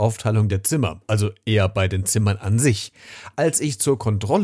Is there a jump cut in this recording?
no; 0 cuts

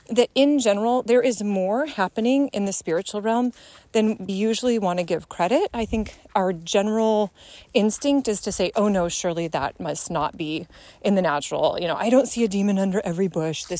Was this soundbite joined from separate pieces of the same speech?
yes; 1 cut; at 4.3 s

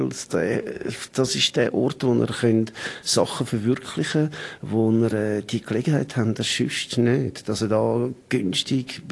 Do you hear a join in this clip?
no; 0 cuts

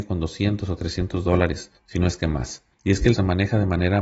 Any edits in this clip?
yes; 3 cuts; at 1.8 s, 2.7 s, 3.1 s

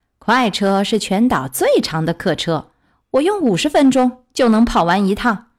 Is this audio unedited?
yes; 0 cuts

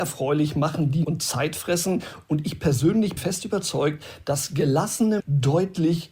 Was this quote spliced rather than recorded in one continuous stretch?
yes; 3 cuts; at 1.0 s, 3.2 s, 5.2 s

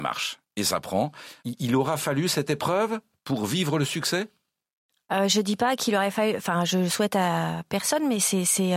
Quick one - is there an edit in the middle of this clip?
no; 0 cuts

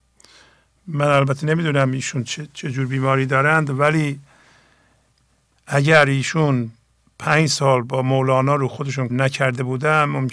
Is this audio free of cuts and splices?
no; 1 cut; at 9.1 s

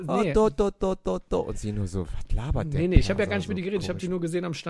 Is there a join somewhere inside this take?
no; 0 cuts

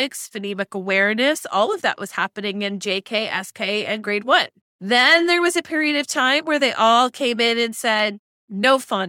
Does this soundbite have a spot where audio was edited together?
no; 0 cuts

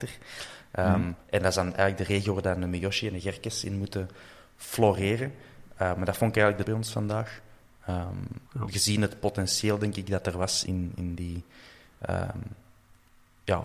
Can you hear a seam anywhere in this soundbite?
yes; 4 cuts; at 1.2 s, 6.7 s, 8.4 s, 10.7 s

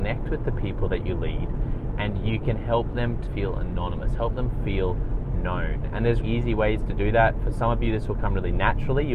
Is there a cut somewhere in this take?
yes; 2 cuts; at 3.3 s, 6.2 s

